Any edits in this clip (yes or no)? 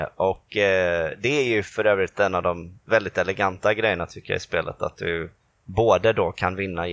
no